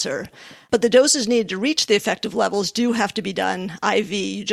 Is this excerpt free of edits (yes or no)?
yes